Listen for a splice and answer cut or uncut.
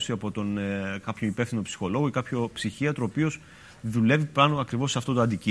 uncut